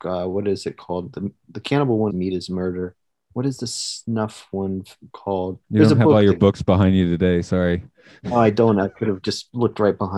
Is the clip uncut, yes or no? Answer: no